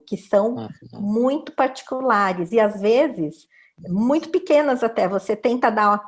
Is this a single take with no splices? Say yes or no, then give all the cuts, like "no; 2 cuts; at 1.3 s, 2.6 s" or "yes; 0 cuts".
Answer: yes; 0 cuts